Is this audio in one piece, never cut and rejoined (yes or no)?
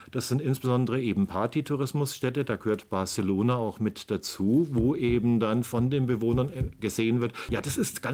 yes